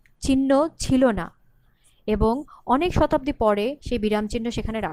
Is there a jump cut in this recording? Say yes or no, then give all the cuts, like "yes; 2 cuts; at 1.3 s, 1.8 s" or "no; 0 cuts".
no; 0 cuts